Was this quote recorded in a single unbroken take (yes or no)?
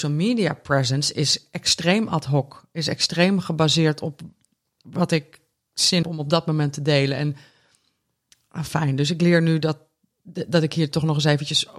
no